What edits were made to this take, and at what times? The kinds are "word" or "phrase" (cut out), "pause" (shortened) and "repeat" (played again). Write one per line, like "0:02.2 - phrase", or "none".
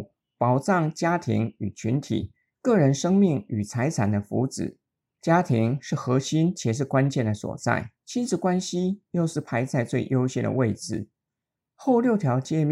0:08.0 - pause